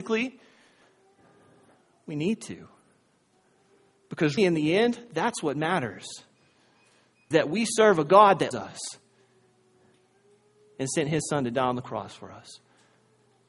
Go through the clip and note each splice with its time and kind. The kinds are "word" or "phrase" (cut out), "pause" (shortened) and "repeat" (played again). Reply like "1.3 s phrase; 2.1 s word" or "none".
4.4 s word; 7.3 s word; 8.5 s word